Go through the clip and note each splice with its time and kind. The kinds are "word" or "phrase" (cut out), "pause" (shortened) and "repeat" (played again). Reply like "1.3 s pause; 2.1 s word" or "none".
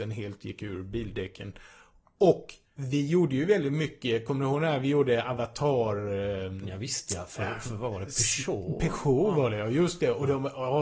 none